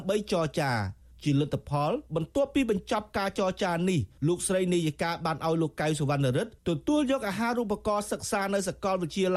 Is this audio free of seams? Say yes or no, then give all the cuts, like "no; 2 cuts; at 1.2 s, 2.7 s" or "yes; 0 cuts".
yes; 0 cuts